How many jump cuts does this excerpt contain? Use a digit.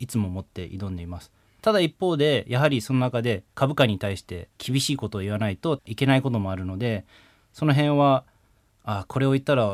1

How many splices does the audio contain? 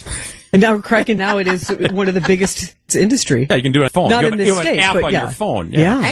3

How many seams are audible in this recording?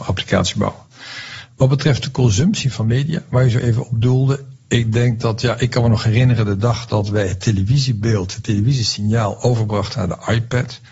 0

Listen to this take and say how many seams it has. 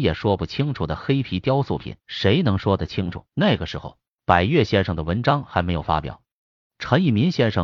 2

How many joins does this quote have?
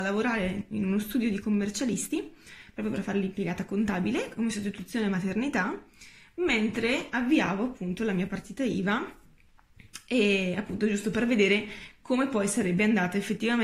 0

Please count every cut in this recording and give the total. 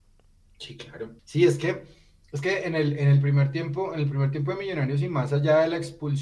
1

